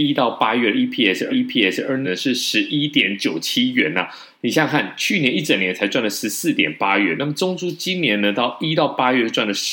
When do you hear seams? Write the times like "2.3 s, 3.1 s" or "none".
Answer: 1.3 s, 2.0 s, 4.3 s